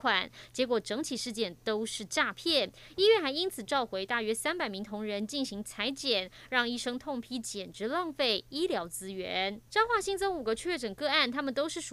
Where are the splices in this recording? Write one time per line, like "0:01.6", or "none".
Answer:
0:09.7